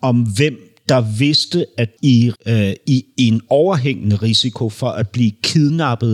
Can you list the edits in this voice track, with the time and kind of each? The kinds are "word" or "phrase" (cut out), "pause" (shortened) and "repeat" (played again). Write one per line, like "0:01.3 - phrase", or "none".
0:02.0 - phrase
0:02.3 - word